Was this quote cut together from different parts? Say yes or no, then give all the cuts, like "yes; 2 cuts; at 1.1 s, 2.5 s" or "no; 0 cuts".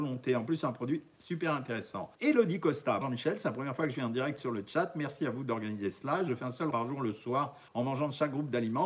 yes; 4 cuts; at 2.1 s, 3.0 s, 6.7 s, 7.7 s